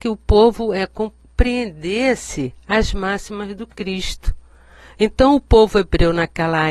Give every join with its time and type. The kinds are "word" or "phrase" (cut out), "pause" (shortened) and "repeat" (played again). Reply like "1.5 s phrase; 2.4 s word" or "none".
none